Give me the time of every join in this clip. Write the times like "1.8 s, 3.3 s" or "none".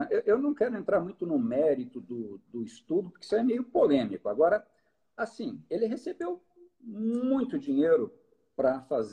none